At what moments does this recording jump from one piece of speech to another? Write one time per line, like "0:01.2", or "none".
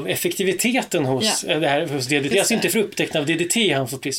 0:02.3